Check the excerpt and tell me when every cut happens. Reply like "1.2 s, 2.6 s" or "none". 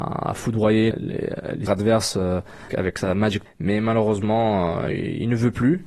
0.9 s, 1.7 s, 2.7 s, 3.5 s